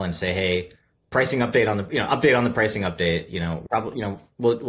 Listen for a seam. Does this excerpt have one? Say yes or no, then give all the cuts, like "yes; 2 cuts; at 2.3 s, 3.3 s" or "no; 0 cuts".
yes; 1 cut; at 3.7 s